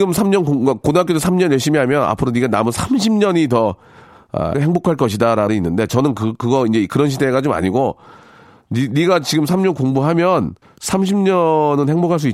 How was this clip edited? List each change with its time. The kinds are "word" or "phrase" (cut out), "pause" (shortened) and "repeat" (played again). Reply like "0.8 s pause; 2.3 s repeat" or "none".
4.5 s word; 5.5 s word; 10.6 s pause